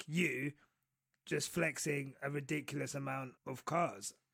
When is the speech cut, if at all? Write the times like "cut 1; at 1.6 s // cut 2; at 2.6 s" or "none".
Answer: cut 1; at 3.4 s